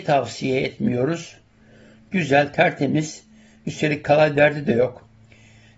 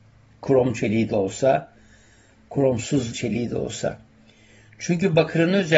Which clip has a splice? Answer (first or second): second